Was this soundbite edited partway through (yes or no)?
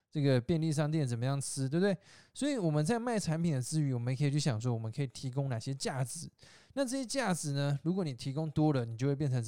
no